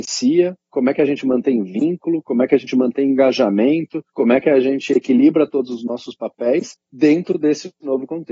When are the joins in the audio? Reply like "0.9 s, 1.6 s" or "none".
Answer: 4.1 s, 6.8 s

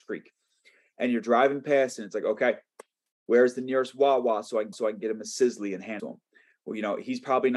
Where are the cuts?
4.7 s, 6.0 s

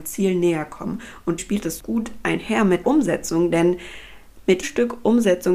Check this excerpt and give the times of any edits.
1.4 s, 1.8 s, 2.8 s, 4.6 s

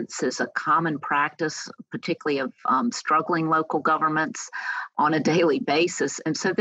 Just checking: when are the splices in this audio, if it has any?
none

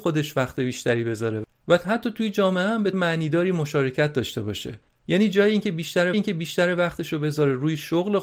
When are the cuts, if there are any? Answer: 2.9 s, 4.9 s, 6.1 s

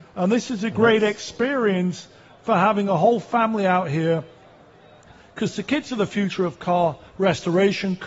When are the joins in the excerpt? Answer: none

